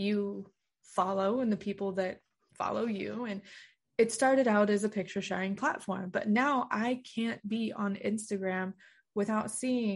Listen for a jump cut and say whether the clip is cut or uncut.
uncut